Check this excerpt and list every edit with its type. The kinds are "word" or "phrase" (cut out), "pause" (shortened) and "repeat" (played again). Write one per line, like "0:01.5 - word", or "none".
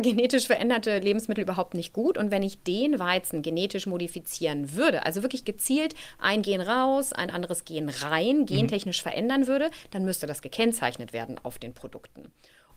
none